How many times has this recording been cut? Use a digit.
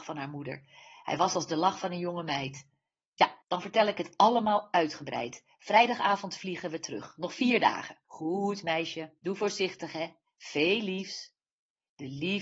3